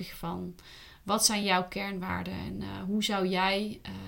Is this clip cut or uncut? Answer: uncut